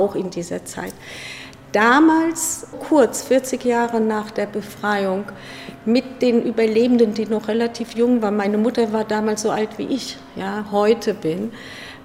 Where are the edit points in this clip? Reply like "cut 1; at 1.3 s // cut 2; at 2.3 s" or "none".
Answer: cut 1; at 2.7 s